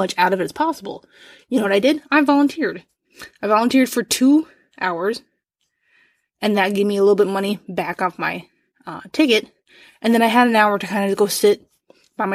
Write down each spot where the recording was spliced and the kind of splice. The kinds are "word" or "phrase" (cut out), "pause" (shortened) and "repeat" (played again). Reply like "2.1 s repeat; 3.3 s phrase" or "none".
none